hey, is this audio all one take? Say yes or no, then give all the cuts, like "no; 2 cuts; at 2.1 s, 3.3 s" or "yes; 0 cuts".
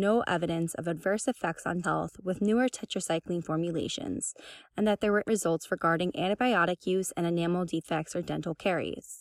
no; 2 cuts; at 1.8 s, 5.2 s